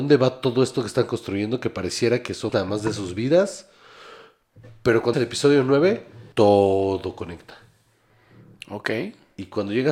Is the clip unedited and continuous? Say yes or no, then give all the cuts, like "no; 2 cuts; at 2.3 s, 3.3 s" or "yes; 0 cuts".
no; 3 cuts; at 2.5 s, 5.1 s, 6.3 s